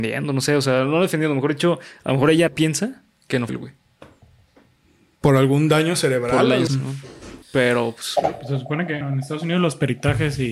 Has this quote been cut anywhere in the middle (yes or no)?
yes